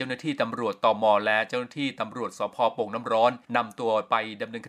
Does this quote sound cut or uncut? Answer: cut